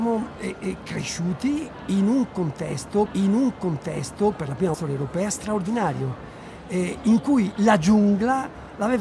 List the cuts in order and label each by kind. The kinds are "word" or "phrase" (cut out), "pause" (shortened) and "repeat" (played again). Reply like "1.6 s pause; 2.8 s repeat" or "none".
3.1 s repeat; 4.7 s phrase; 7.5 s word